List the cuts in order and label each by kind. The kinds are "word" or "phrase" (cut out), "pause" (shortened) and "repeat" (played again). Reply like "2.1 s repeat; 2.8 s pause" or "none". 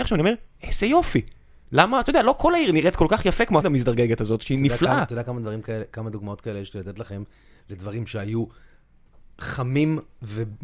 3.6 s word